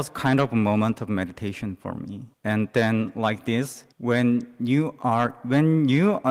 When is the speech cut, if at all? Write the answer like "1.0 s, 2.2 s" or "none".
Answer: 2.3 s, 3.9 s